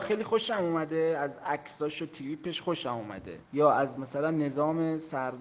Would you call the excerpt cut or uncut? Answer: cut